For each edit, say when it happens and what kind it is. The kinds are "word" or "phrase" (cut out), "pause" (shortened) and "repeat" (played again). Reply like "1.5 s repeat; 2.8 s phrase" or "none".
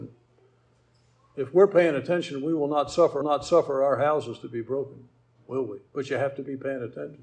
3.2 s repeat; 5.9 s pause